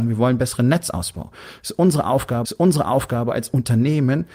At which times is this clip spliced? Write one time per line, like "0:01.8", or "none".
0:02.4